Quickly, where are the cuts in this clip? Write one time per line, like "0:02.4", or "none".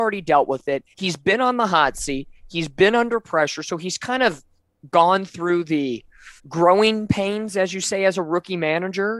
0:00.9
0:06.4